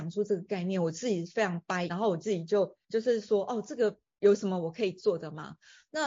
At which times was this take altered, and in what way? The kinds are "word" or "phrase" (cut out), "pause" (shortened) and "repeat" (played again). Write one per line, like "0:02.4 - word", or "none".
0:01.9 - word
0:02.8 - pause